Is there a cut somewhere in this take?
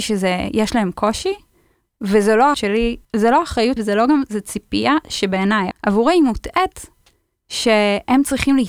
yes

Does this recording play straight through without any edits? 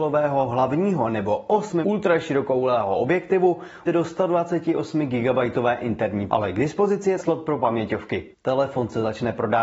no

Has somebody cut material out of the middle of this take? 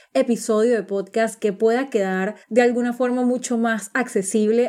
yes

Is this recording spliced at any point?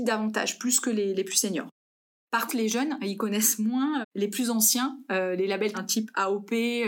yes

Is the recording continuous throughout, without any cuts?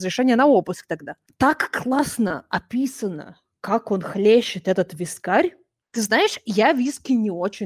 yes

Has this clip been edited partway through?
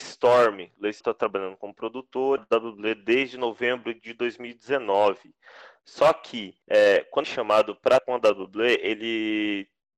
yes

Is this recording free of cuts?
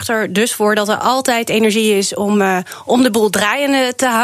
yes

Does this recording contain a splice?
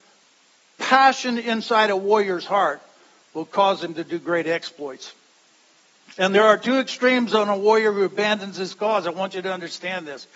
no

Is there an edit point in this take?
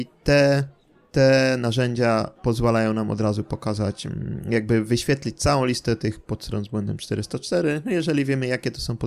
yes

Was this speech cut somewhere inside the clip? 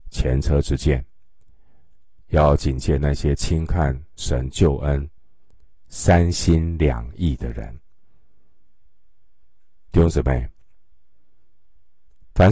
no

